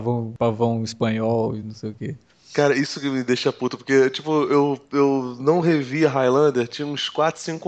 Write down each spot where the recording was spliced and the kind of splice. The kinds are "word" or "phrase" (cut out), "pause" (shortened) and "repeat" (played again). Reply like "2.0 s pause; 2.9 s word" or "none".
none